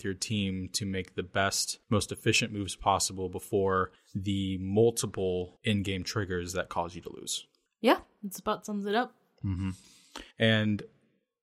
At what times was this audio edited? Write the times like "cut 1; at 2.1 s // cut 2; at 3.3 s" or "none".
cut 1; at 1.8 s // cut 2; at 4.0 s // cut 3; at 5.6 s // cut 4; at 7.7 s // cut 5; at 10.3 s